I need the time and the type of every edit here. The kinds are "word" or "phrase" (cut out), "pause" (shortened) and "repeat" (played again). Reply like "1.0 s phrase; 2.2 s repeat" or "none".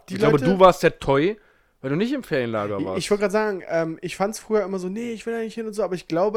none

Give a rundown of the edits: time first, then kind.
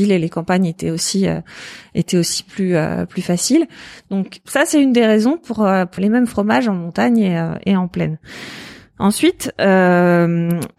6.0 s phrase

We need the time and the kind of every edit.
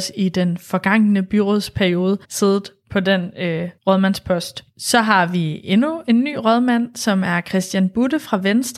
2.2 s pause; 3.8 s pause

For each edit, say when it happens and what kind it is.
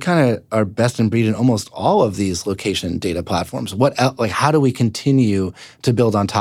none

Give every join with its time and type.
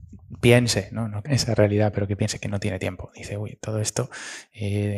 1.3 s word

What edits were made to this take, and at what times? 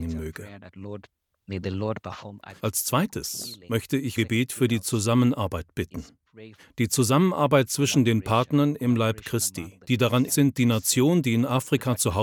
2.6 s pause; 4.2 s word; 6.6 s pause; 9.8 s pause; 10.3 s word

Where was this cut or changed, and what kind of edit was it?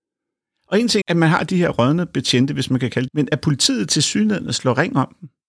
1.0 s word; 3.1 s word

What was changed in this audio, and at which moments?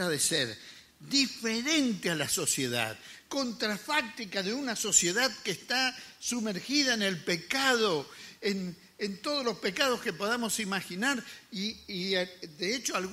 none

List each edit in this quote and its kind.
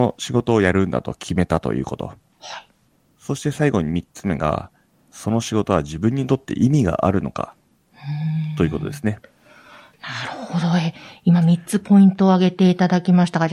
none

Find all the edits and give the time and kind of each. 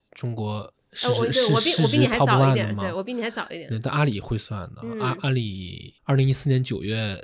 6.0 s pause

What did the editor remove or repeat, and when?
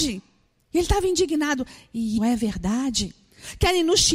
2.2 s word

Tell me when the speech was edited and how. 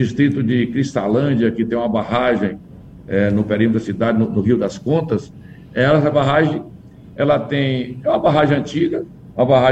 none

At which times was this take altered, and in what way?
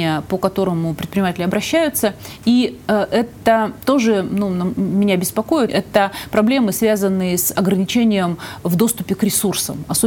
5.7 s word

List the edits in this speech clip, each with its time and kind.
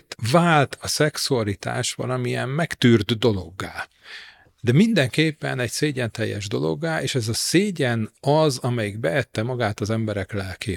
none

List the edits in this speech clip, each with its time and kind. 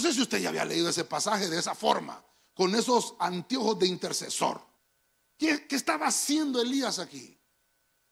4.8 s pause

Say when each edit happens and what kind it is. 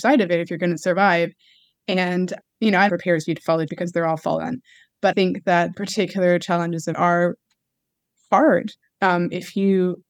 2.4 s word; 2.9 s phrase; 3.7 s word; 5.1 s word; 5.7 s word; 6.9 s word; 8.8 s pause

